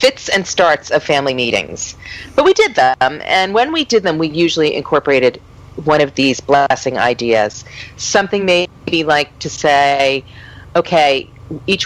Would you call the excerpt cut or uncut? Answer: uncut